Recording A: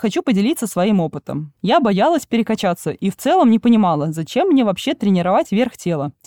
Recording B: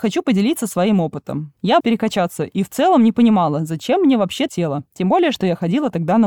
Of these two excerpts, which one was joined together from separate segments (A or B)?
B